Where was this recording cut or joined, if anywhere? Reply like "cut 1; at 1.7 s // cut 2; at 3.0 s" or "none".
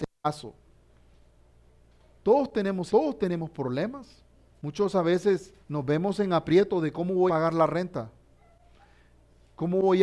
cut 1; at 2.9 s // cut 2; at 4.5 s // cut 3; at 5.6 s // cut 4; at 7.3 s